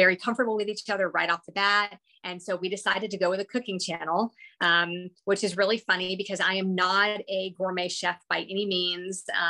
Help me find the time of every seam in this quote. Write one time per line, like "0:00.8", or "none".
none